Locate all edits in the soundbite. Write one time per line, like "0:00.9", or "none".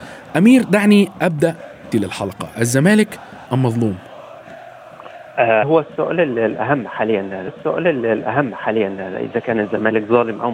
0:01.9
0:03.5
0:05.6
0:07.5